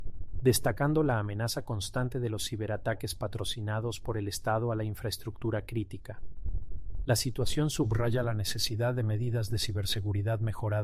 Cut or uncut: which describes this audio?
uncut